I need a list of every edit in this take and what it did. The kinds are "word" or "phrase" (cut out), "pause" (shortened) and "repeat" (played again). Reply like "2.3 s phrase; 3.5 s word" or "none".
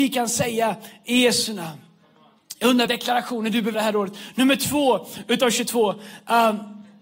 2.9 s word; 3.7 s word